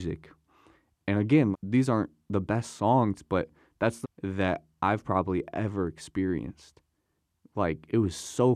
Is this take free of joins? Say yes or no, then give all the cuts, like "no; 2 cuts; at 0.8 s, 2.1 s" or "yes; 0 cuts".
no; 2 cuts; at 1.5 s, 4.0 s